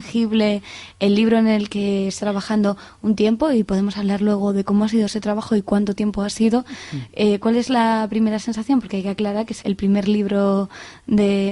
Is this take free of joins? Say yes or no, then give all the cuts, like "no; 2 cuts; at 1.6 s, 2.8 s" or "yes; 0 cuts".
no; 2 cuts; at 2.2 s, 9.6 s